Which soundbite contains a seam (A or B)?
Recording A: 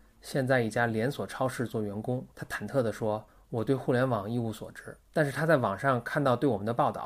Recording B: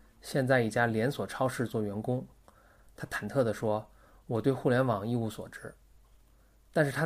A